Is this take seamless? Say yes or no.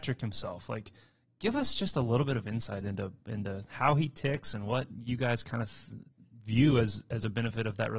yes